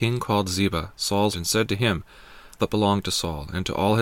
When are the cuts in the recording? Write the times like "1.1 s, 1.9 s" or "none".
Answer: 1.3 s, 2.6 s